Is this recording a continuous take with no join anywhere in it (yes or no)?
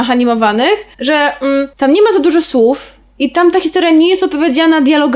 no